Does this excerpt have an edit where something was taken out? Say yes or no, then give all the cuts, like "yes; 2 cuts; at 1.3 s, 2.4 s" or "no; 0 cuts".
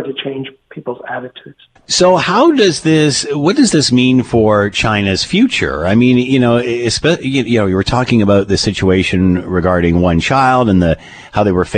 yes; 1 cut; at 1.8 s